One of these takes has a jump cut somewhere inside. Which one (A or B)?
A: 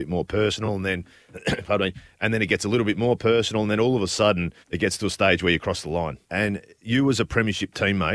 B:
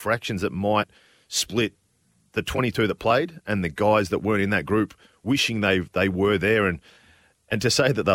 A